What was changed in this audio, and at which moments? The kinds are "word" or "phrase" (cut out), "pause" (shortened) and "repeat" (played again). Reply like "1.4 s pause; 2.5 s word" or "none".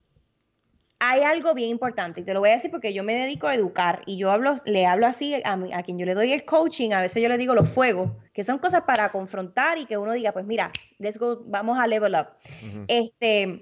8.3 s pause